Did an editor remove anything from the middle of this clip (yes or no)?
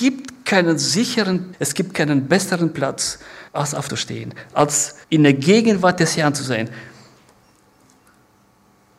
yes